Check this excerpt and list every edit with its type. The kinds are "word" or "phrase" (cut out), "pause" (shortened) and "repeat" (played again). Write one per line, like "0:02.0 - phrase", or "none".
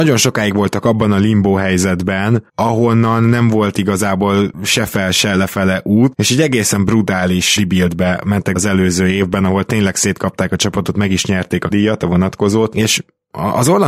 0:02.5 - pause
0:06.1 - word
0:07.6 - word
0:08.6 - word
0:11.7 - word